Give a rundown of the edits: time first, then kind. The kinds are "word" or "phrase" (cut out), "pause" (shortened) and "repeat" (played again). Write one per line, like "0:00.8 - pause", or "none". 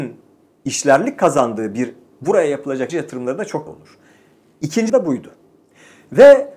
0:02.1 - word
0:02.9 - word
0:03.7 - word
0:04.9 - word